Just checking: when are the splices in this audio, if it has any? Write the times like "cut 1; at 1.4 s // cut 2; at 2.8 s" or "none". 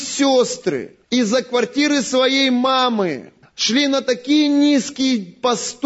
cut 1; at 1.0 s // cut 2; at 3.4 s